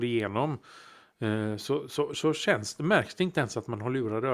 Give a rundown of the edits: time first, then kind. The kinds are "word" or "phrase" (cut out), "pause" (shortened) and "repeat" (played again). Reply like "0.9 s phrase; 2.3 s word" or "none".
none